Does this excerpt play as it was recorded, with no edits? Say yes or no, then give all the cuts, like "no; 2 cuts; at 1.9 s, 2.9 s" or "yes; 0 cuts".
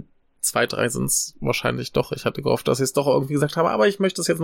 yes; 0 cuts